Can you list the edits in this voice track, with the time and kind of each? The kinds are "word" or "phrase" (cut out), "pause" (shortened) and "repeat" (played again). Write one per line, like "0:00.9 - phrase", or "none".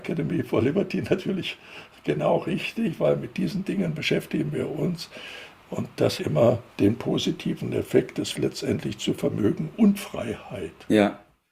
0:06.2 - word
0:06.7 - pause
0:08.3 - word

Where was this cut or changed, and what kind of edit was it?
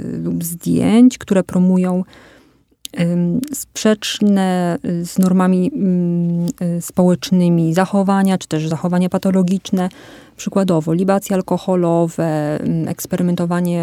none

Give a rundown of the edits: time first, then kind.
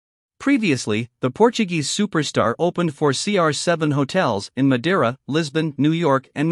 none

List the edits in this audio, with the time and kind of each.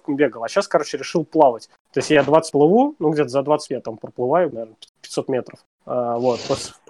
0:02.5 - word
0:03.7 - word
0:04.5 - word

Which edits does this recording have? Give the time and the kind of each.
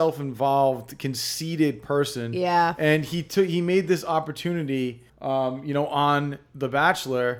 0:05.1 - pause

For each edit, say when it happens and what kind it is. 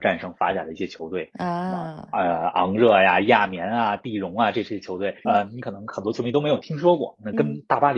0:05.2 - word

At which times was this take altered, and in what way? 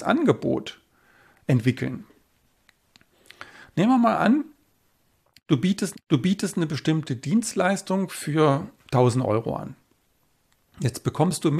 0:05.9 - repeat
0:08.7 - pause

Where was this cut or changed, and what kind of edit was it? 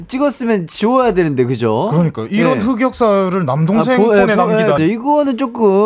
0:04.8 - word

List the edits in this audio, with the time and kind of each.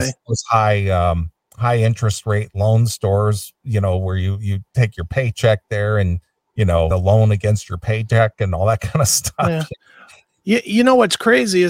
0:06.9 - phrase

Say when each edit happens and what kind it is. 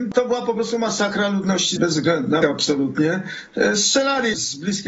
0:01.8 - word
0:02.4 - word

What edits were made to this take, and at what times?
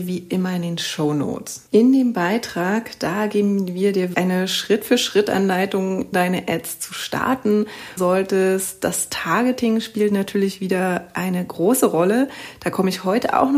0:01.7 - pause
0:04.1 - word
0:06.1 - word
0:08.0 - phrase

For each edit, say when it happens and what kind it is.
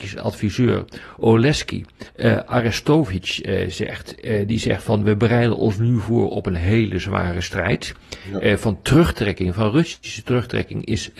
0:02.1 - pause

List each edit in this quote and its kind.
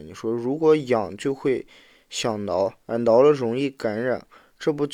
none

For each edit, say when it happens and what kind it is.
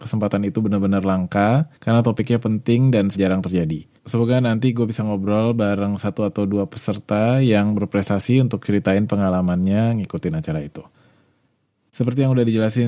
0:01.8 - pause
0:03.1 - word
0:04.0 - pause

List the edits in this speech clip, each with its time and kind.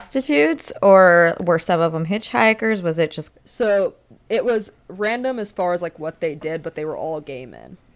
0:03.3 - phrase

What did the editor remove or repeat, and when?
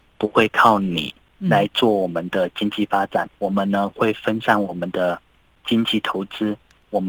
0:03.3 - word

